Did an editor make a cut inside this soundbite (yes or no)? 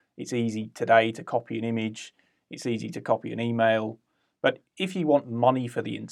no